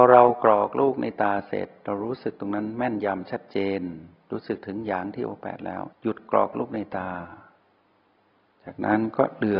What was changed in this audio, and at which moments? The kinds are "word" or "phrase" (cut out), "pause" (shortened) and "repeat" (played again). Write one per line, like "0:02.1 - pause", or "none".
0:05.9 - pause